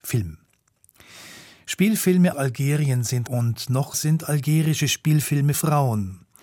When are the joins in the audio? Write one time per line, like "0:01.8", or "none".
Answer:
0:02.3
0:03.3
0:03.9
0:05.5